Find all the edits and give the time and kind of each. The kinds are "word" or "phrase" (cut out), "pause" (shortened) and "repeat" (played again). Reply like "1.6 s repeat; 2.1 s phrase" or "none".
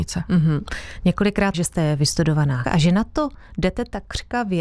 1.5 s phrase; 2.6 s word